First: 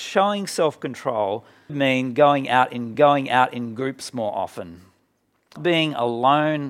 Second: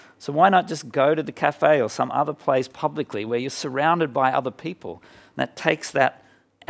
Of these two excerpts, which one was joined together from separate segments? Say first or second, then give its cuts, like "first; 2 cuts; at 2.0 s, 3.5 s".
first; 3 cuts; at 1.7 s, 2.9 s, 5.6 s